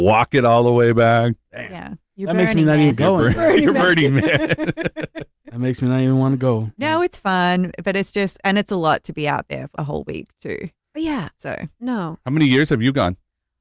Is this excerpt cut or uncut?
cut